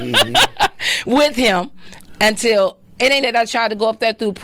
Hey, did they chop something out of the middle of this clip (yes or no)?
yes